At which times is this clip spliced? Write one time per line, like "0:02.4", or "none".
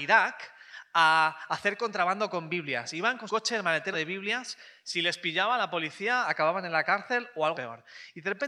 0:03.3
0:03.9
0:07.5